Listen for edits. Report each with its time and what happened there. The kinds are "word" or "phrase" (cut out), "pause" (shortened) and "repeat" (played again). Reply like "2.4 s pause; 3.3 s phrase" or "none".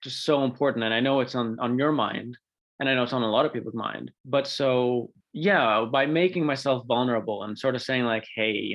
4.2 s pause; 5.2 s pause